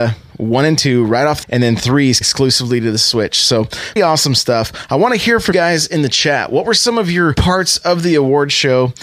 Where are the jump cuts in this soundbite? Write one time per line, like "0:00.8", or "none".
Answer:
0:01.4
0:02.2
0:04.0
0:05.5
0:07.3

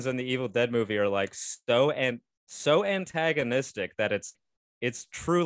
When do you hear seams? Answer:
0:04.3

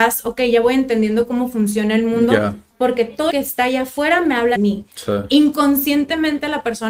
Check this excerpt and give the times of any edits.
0:03.3
0:04.6

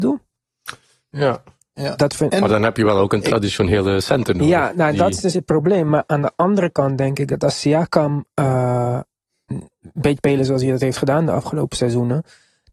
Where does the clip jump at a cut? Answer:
0:05.3
0:10.2

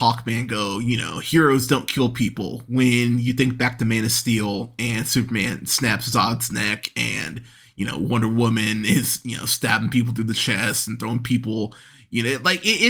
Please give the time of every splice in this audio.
none

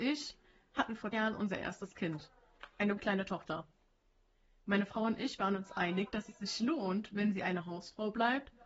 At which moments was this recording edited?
0:01.1
0:03.0

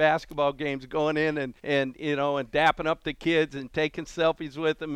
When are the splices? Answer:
0:01.6

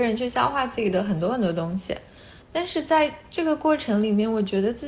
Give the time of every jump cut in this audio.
0:02.4

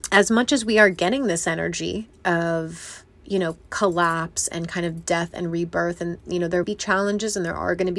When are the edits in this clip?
0:06.6

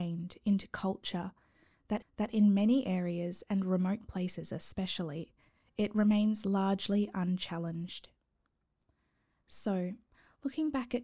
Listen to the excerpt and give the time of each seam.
0:02.0

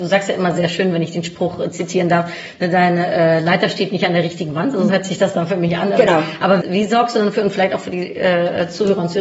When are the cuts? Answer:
0:04.9
0:06.6

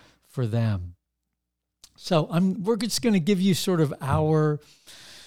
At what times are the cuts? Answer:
none

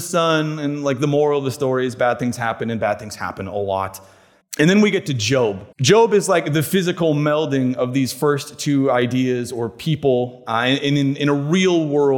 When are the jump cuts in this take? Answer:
0:04.4
0:05.7

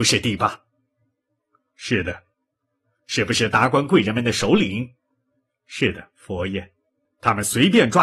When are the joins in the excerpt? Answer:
none

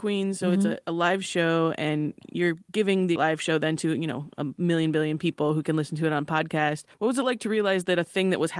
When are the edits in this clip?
0:03.2
0:06.9

